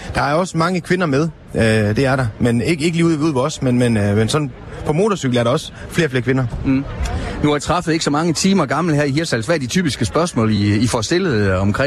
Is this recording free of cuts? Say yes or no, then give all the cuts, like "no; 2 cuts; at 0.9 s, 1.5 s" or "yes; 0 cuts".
yes; 0 cuts